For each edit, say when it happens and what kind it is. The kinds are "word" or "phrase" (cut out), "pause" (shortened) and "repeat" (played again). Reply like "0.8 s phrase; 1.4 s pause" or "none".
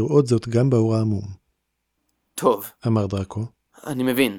none

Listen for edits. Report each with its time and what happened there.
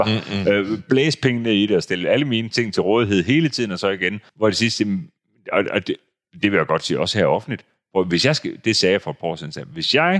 4.3 s pause

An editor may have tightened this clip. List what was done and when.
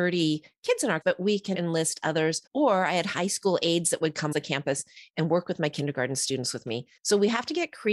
1.0 s word; 1.5 s word; 2.5 s pause; 4.3 s word; 7.0 s pause

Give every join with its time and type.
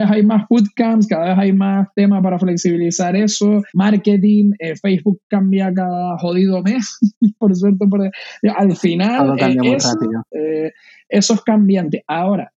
3.7 s pause

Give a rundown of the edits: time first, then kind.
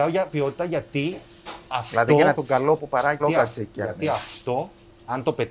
2.3 s word; 2.8 s word; 3.2 s word

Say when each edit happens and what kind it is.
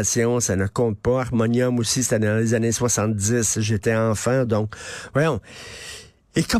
none

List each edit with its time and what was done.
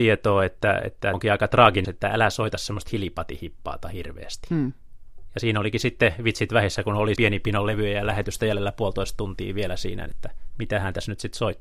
1.1 s word; 1.8 s word; 7.2 s word

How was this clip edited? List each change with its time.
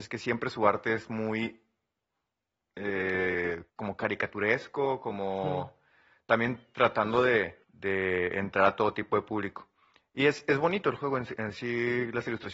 3.7 s pause; 7.6 s pause

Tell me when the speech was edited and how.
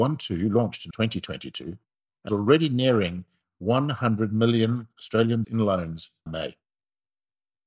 0.9 s word; 2.3 s word; 5.4 s word; 6.3 s word

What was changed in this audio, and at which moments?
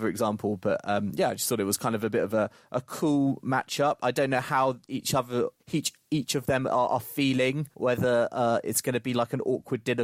5.6 s pause; 7.7 s pause

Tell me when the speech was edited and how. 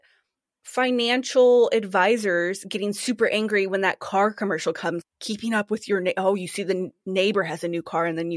5.0 s phrase

